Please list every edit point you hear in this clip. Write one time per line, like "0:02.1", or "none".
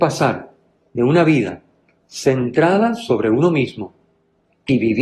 none